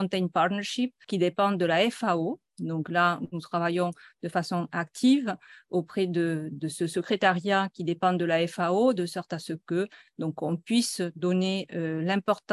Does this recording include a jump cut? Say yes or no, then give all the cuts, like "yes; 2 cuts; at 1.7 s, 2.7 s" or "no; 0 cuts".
no; 0 cuts